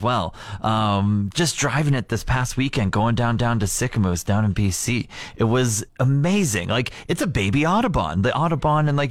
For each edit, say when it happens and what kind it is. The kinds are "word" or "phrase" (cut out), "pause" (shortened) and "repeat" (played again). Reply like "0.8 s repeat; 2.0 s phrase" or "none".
1.3 s word; 3.4 s repeat; 5.9 s pause